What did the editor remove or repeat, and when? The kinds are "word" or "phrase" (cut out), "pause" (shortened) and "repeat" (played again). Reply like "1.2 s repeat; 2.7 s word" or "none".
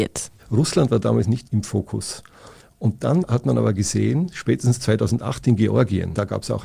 1.4 s word